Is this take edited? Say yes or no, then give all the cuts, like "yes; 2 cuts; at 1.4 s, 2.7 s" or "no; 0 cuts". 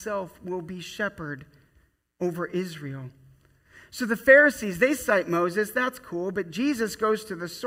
no; 0 cuts